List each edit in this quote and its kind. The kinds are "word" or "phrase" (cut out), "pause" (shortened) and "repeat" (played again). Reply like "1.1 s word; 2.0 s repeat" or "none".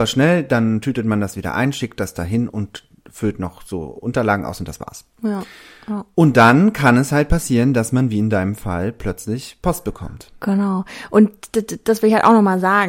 none